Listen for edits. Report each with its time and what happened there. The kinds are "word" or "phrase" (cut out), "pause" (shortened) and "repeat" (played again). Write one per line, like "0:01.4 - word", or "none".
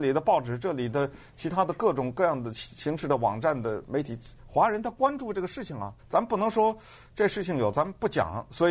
0:06.0 - pause